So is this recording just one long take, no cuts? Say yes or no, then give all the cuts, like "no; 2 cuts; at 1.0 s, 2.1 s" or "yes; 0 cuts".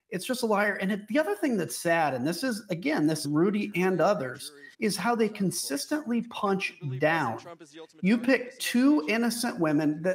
no; 2 cuts; at 3.2 s, 4.7 s